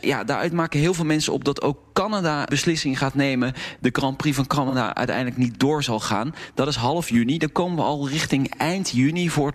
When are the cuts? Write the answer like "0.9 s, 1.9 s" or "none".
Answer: 2.5 s